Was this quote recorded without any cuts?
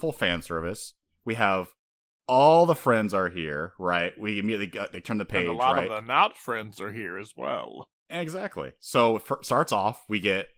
yes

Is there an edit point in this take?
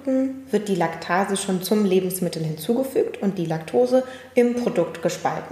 yes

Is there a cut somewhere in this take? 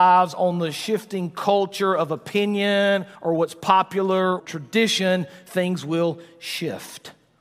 yes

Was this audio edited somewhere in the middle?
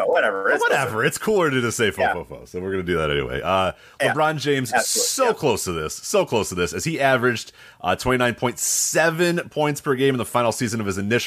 no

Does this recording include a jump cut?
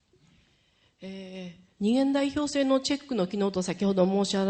yes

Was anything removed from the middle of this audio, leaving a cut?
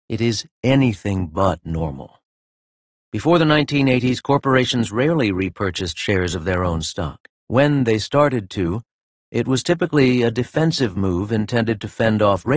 yes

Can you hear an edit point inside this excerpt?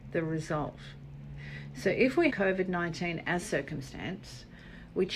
yes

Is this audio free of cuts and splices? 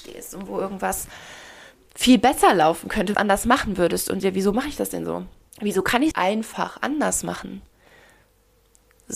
no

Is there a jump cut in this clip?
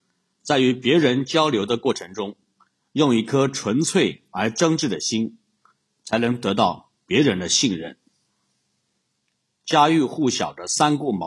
no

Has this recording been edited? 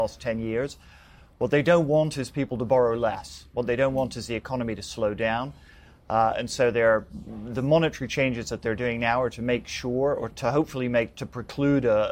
yes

